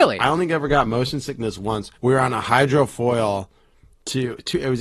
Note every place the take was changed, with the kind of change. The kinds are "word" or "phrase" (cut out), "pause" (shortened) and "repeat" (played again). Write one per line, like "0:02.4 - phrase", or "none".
0:01.9 - pause